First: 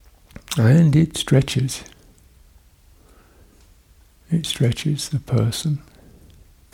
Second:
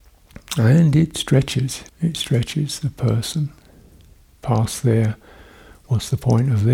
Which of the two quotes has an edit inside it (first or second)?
second